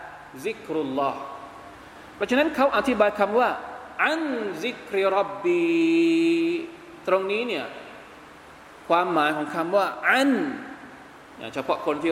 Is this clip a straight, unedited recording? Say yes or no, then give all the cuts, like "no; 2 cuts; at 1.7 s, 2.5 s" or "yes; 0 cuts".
yes; 0 cuts